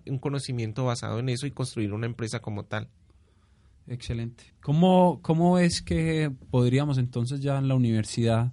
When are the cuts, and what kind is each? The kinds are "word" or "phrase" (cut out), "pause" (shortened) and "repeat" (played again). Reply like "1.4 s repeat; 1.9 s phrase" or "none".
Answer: 4.5 s pause